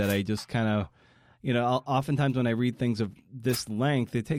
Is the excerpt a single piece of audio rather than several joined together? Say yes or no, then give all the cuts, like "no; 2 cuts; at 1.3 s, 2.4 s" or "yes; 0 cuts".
yes; 0 cuts